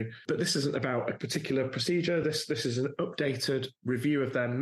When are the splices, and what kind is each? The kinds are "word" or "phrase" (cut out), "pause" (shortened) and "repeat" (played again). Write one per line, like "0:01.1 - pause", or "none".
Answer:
none